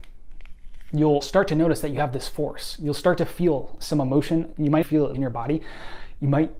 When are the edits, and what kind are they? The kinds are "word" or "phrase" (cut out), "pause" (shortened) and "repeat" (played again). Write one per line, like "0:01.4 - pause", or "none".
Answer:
0:01.2 - word
0:04.8 - word
0:05.1 - word